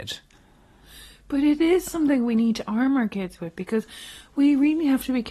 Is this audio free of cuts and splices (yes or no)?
yes